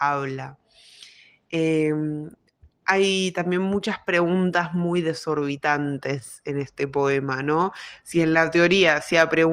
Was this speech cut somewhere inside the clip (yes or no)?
no